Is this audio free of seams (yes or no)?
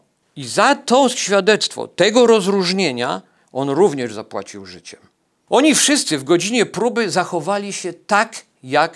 yes